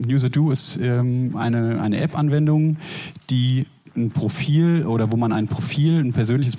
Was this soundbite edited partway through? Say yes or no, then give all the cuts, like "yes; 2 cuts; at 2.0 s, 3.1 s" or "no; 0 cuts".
no; 0 cuts